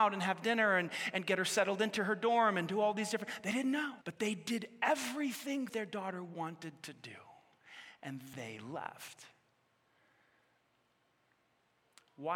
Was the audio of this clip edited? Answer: yes; 3 cuts; at 4.0 s, 5.7 s, 8.3 s

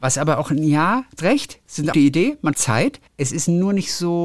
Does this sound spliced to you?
yes; 4 cuts; at 1.2 s, 1.9 s, 2.5 s, 3.1 s

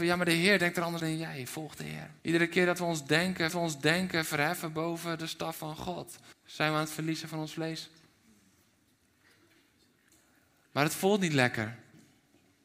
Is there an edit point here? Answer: yes; 4 cuts; at 1.0 s, 2.2 s, 3.5 s, 6.3 s

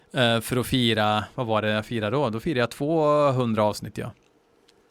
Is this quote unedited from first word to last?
yes; 0 cuts

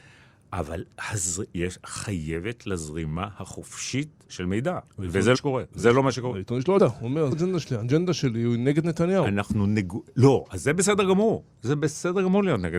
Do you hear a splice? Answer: yes; 6 cuts; at 0.9 s, 2.6 s, 4.3 s, 5.3 s, 6.8 s, 7.3 s

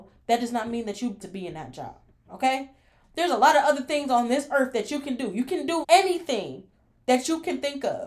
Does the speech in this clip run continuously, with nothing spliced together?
no; 2 cuts; at 1.2 s, 5.8 s

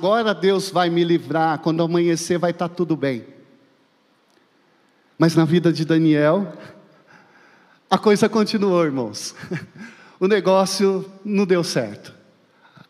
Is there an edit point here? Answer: no; 0 cuts

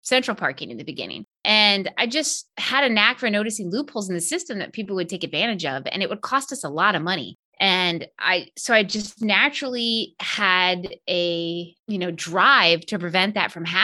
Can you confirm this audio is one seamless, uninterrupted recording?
no; 4 cuts; at 1.3 s, 2.5 s, 7.5 s, 11.8 s

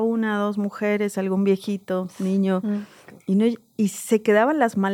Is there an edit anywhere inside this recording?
no; 0 cuts

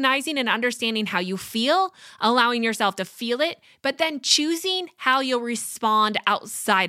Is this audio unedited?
yes; 0 cuts

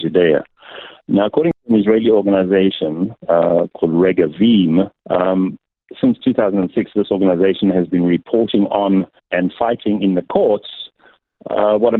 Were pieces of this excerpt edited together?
yes; 3 cuts; at 3.2 s, 5.0 s, 9.2 s

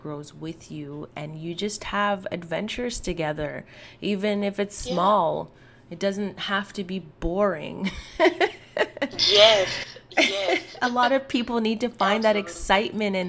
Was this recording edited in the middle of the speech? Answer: no; 0 cuts

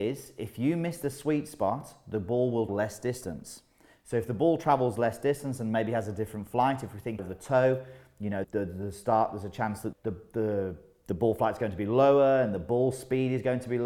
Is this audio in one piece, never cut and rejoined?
no; 4 cuts; at 2.7 s, 7.2 s, 8.4 s, 9.9 s

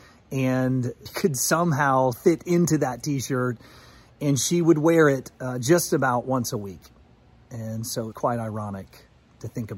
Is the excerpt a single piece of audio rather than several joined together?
no; 3 cuts; at 1.1 s, 2.1 s, 8.1 s

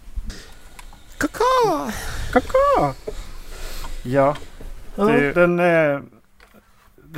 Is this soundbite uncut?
no; 1 cut; at 5.3 s

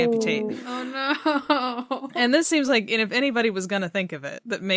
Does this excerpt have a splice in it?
no; 0 cuts

